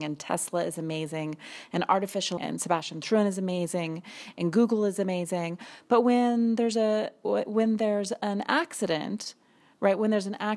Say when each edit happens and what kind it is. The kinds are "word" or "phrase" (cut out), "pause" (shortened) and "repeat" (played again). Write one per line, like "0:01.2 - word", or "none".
0:02.4 - phrase